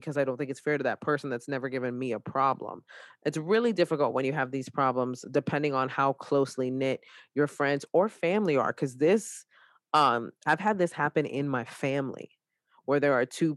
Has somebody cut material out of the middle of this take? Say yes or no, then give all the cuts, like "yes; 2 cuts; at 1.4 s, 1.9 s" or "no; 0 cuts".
no; 0 cuts